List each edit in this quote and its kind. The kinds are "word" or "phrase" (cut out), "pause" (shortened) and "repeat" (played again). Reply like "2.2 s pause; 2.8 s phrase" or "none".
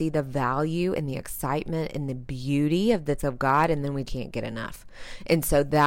3.2 s word; 4.1 s word

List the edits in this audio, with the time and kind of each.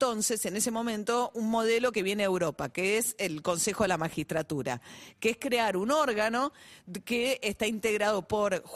none

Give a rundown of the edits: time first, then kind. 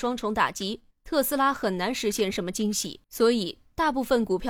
3.0 s pause

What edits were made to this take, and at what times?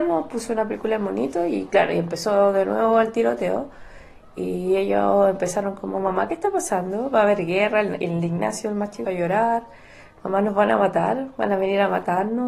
9.0 s phrase

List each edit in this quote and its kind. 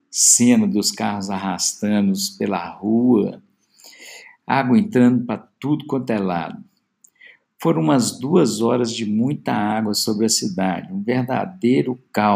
none

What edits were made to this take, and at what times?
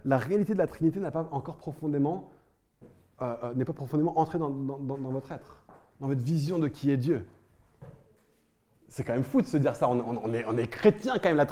none

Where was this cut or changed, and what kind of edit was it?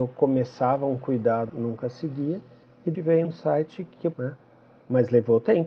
1.5 s word; 2.9 s word; 3.2 s word; 4.1 s word

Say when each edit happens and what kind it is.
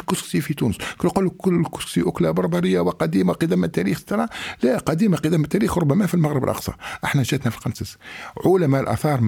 none

